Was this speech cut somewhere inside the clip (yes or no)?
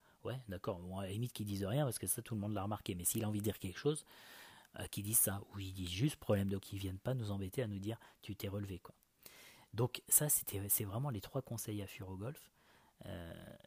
yes